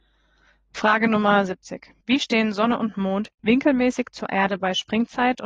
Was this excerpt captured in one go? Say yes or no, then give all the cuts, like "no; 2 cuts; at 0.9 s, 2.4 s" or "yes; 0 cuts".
no; 1 cut; at 2.0 s